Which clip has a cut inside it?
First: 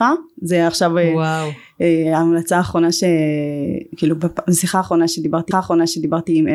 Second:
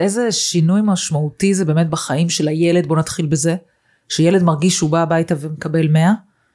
first; 1 cut; at 5.5 s

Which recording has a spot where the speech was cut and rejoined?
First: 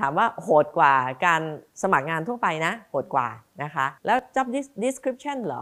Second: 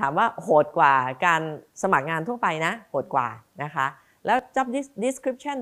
first; 1 cut; at 4.0 s

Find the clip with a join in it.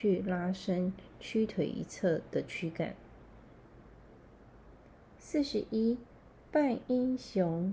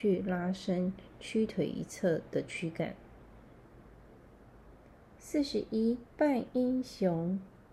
second; 1 cut; at 6.1 s

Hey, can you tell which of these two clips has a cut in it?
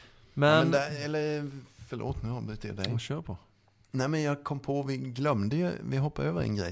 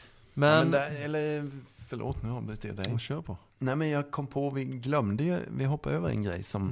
second; 1 cut; at 3.5 s

